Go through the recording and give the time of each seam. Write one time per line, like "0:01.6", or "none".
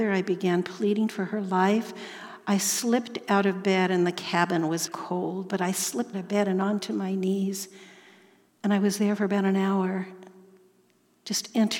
0:04.9
0:06.1

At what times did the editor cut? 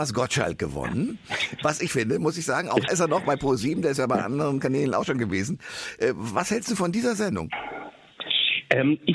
0:01.9
0:02.9

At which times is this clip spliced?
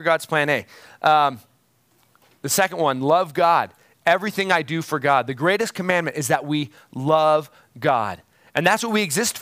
none

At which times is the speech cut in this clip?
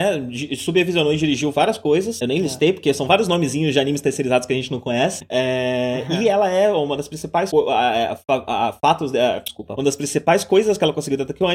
none

